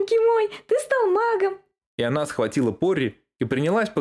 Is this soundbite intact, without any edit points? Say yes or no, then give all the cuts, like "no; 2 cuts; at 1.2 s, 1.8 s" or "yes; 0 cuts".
yes; 0 cuts